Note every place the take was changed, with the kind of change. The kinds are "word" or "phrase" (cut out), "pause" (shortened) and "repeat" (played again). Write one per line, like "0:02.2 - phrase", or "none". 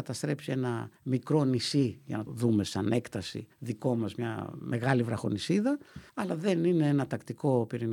0:01.0 - pause
0:02.3 - word
0:03.5 - pause
0:06.1 - pause